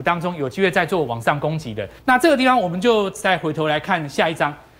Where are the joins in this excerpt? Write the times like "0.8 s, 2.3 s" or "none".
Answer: 2.0 s